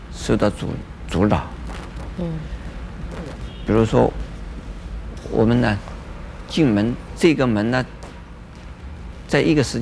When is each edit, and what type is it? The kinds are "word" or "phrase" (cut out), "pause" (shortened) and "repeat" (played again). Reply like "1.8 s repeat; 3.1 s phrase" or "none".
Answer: 7.1 s phrase